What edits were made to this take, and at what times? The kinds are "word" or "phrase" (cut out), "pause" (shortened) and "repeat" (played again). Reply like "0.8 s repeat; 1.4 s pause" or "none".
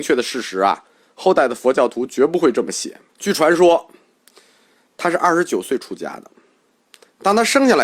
3.1 s pause